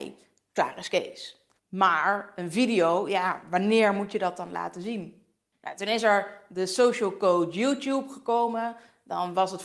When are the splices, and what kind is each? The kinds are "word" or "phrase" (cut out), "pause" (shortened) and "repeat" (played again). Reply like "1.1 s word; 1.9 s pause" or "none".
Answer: 1.6 s pause; 5.5 s pause